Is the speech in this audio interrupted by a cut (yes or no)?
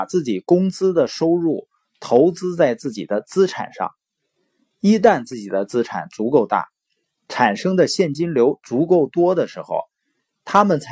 no